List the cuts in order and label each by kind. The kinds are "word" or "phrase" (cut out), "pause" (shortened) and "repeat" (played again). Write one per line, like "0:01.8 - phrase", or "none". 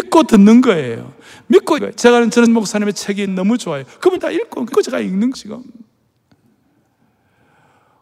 0:01.8 - word
0:02.5 - word
0:03.3 - word
0:04.2 - word
0:04.7 - word
0:05.3 - word